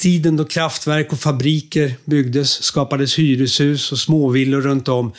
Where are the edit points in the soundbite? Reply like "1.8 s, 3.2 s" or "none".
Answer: none

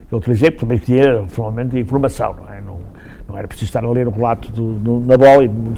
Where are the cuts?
none

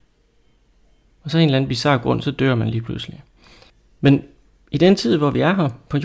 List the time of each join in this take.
none

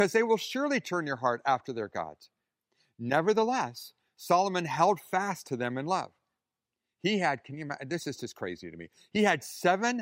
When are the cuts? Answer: none

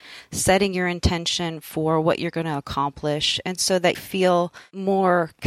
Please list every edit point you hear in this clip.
3.9 s

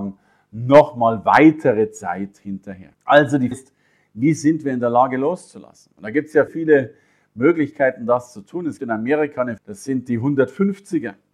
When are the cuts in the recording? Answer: 2.9 s, 3.5 s, 6.5 s, 8.8 s, 9.6 s

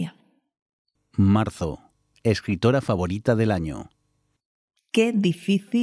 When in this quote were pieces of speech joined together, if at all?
none

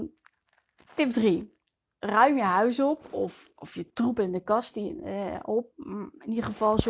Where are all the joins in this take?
none

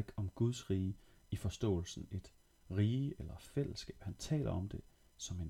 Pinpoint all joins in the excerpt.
none

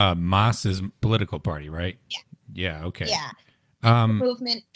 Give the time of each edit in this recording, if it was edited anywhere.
0.9 s, 2.0 s

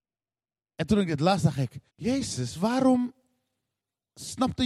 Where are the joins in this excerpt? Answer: 1.9 s

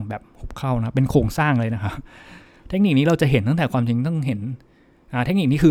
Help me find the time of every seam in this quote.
none

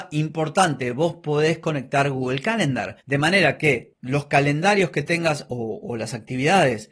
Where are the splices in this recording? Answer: 3.0 s

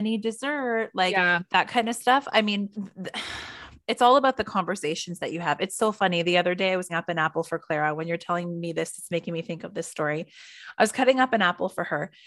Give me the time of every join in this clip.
2.7 s, 6.9 s

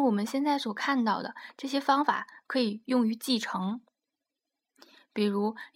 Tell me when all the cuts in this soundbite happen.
none

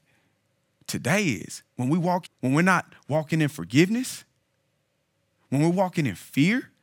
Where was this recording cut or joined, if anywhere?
1.7 s, 2.2 s

